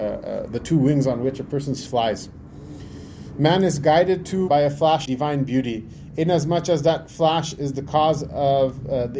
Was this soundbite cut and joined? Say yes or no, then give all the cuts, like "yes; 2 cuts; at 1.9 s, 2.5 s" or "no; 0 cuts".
yes; 3 cuts; at 1.9 s, 4.5 s, 5.1 s